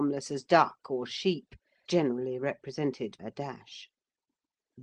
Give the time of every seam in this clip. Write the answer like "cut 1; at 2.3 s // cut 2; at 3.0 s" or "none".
cut 1; at 1.9 s // cut 2; at 3.2 s

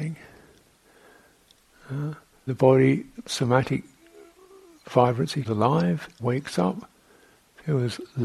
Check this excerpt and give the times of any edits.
cut 1; at 2.5 s // cut 2; at 3.3 s // cut 3; at 5.4 s // cut 4; at 6.2 s

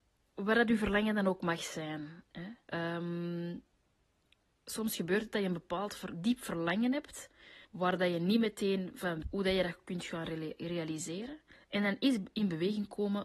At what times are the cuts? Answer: cut 1; at 2.6 s // cut 2; at 7.6 s // cut 3; at 9.2 s // cut 4; at 11.5 s

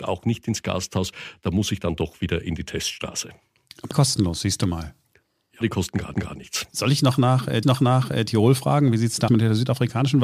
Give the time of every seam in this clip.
cut 1; at 3.9 s // cut 2; at 5.6 s // cut 3; at 6.1 s // cut 4; at 7.6 s // cut 5; at 9.3 s

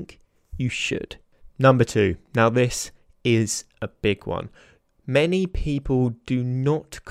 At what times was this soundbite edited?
none

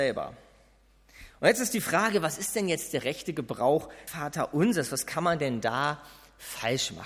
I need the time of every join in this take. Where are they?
cut 1; at 4.1 s

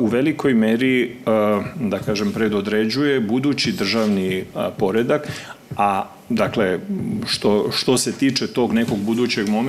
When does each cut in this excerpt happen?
none

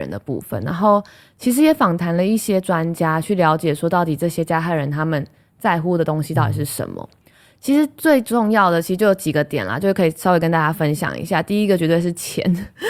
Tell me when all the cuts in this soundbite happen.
none

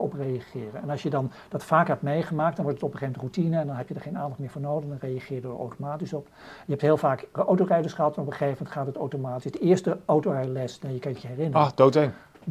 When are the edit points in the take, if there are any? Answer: cut 1; at 7.3 s

